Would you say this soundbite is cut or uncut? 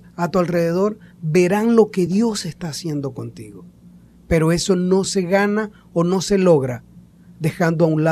uncut